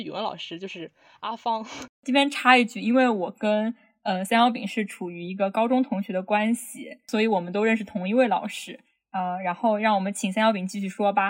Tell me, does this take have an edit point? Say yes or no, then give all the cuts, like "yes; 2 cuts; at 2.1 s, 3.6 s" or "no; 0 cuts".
yes; 1 cut; at 1.9 s